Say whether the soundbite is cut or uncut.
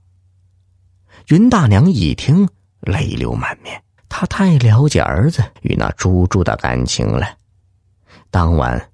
cut